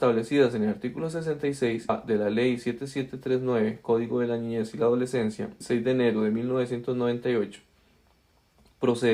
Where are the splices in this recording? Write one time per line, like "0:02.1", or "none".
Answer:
0:01.9
0:05.6